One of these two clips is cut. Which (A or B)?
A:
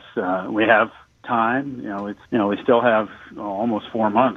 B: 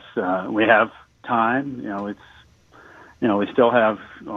A